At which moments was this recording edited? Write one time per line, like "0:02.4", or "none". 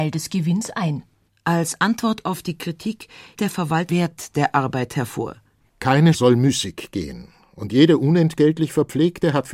0:01.1
0:03.3
0:03.9
0:06.1